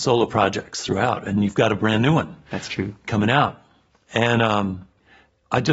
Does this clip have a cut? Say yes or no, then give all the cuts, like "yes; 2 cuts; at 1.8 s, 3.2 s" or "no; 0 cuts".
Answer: no; 0 cuts